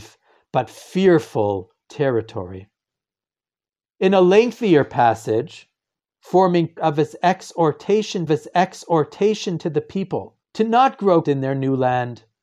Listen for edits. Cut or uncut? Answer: cut